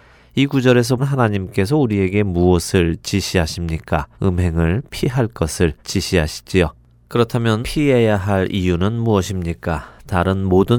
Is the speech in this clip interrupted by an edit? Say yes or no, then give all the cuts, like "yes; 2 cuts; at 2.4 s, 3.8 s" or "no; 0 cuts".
yes; 4 cuts; at 1.0 s, 4.1 s, 5.8 s, 7.6 s